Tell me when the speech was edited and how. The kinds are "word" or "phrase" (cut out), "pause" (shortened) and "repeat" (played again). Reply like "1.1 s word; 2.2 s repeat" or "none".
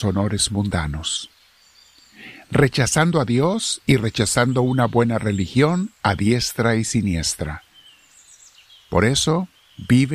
none